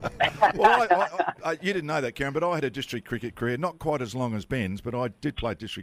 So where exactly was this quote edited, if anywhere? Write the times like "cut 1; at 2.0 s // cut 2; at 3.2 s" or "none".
none

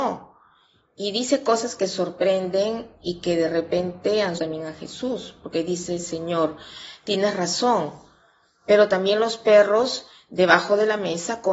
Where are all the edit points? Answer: cut 1; at 4.4 s

